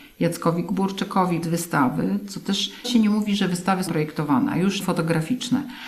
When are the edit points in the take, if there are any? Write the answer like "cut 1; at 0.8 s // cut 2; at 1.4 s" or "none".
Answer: cut 1; at 1.4 s // cut 2; at 2.8 s // cut 3; at 3.9 s // cut 4; at 4.8 s